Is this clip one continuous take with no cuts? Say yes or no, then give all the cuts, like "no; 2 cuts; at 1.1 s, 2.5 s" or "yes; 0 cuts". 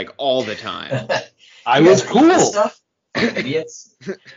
yes; 0 cuts